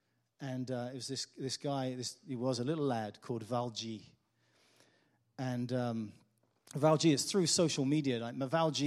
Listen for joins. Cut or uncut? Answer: uncut